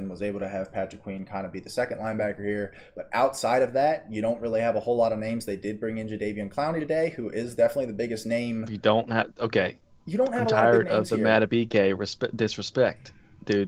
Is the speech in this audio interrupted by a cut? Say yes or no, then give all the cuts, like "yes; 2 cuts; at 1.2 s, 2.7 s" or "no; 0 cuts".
no; 0 cuts